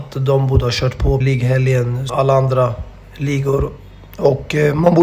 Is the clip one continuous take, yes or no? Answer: no